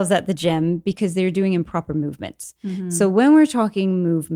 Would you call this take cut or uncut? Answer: uncut